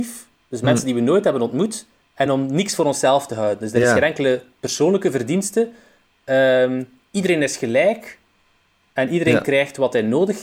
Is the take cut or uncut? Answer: uncut